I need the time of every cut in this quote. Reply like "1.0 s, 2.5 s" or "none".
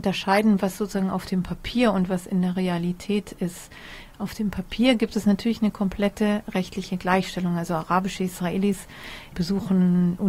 none